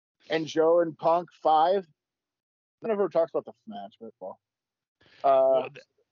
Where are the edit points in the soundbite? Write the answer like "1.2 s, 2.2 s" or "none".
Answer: 1.4 s, 2.8 s, 3.6 s, 4.2 s